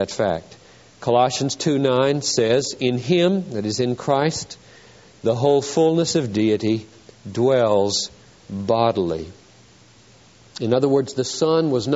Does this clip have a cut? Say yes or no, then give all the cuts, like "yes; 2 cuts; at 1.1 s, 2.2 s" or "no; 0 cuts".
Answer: no; 0 cuts